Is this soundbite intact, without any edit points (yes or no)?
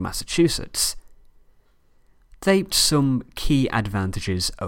no